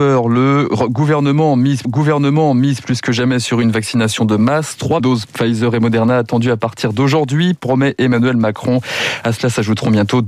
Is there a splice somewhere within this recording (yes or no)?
yes